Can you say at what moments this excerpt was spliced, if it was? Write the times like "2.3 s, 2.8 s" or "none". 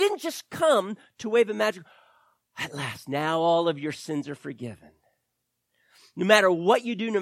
none